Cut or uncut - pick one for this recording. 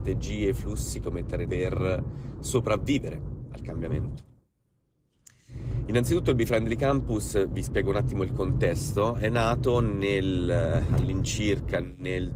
cut